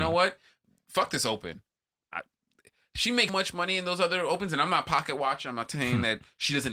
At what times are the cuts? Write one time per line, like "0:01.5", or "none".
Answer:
0:03.3

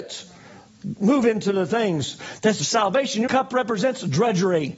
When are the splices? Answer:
0:02.6
0:03.3

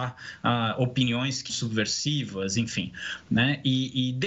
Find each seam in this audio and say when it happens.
0:01.5

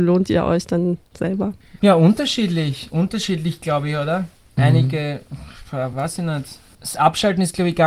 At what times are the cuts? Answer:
none

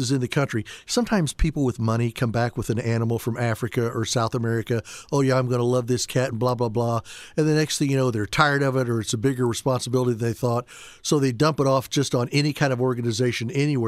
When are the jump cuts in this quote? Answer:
none

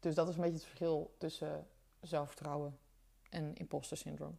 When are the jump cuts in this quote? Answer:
none

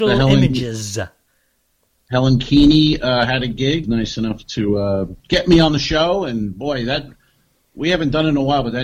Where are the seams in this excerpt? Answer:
0:03.8
0:05.2

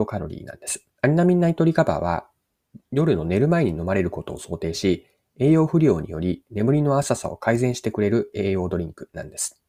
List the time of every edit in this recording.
0:00.9

